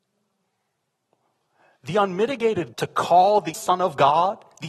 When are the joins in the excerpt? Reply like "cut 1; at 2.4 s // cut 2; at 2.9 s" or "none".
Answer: cut 1; at 2.7 s // cut 2; at 3.5 s